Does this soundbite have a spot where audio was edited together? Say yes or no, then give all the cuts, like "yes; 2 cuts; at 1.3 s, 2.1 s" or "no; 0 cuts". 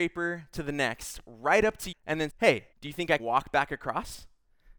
yes; 4 cuts; at 1.9 s, 2.3 s, 2.7 s, 3.2 s